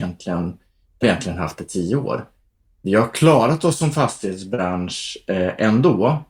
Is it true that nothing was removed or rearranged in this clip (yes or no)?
no